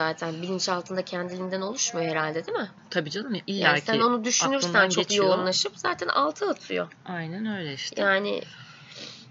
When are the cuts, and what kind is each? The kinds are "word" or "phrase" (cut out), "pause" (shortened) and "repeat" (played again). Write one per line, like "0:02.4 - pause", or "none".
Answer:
none